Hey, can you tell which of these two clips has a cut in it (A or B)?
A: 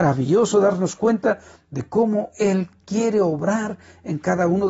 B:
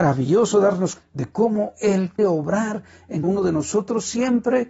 B